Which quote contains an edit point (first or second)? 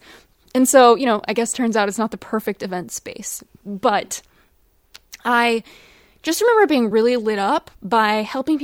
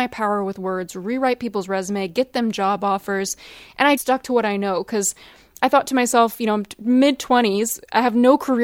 second